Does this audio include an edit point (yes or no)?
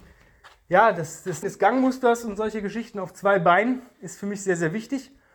yes